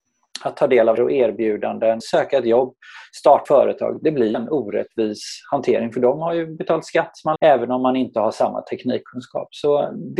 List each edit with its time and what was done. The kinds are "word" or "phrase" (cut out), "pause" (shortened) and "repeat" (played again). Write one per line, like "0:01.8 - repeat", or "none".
0:01.0 - word
0:02.0 - word
0:03.5 - word
0:04.3 - word
0:07.4 - word